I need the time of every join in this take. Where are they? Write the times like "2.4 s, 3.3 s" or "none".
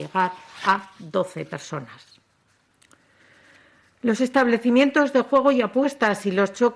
none